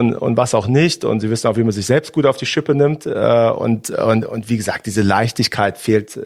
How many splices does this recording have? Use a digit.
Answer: 0